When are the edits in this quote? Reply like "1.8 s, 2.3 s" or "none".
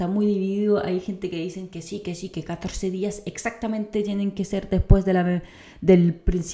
none